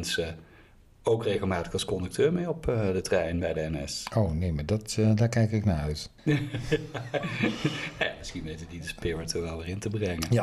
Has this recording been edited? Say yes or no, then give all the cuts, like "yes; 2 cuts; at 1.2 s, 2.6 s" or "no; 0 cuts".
yes; 1 cut; at 6.2 s